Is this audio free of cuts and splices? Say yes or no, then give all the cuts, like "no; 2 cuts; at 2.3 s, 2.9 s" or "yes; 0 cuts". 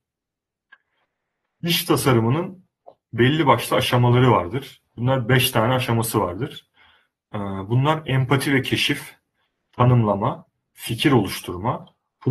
yes; 0 cuts